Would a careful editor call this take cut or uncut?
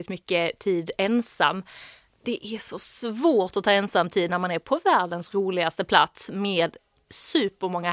uncut